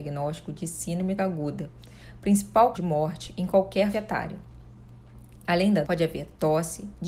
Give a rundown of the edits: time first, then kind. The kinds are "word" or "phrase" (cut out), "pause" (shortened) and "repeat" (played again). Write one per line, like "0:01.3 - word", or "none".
0:01.2 - word
0:02.7 - word
0:03.9 - word
0:05.8 - word